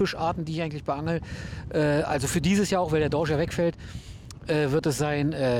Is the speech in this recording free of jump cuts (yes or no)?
yes